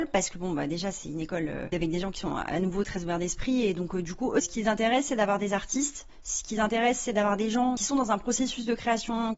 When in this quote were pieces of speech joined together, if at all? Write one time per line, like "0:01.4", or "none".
none